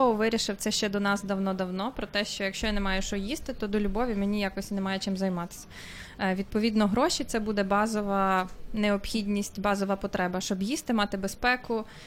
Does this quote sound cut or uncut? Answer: uncut